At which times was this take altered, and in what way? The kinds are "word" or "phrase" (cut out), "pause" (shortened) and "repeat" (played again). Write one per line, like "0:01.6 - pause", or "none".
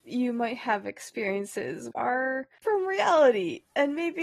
0:01.9 - word
0:02.6 - word